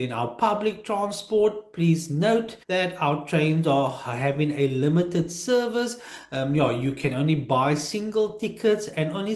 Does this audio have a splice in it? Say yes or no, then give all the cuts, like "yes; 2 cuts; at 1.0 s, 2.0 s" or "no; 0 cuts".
yes; 1 cut; at 2.6 s